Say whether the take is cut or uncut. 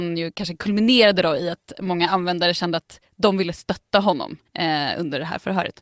cut